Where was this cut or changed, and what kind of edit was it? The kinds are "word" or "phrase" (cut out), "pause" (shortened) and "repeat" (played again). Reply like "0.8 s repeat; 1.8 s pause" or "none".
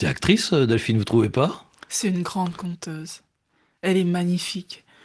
none

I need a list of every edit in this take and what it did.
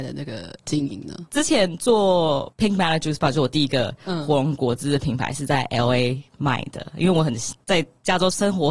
1.3 s pause

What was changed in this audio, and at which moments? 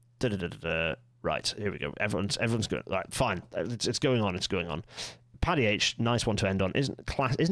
1.1 s pause

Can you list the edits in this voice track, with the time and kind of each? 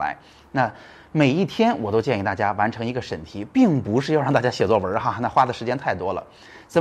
none

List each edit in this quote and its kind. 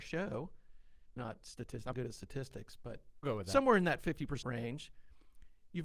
1.2 s word; 1.9 s word; 3.2 s word; 4.4 s word

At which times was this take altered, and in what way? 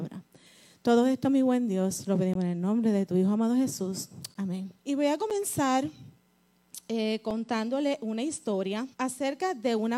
4.8 s pause; 8.9 s pause

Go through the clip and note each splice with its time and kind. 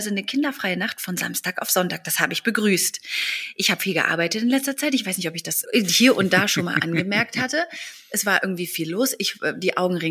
5.6 s word

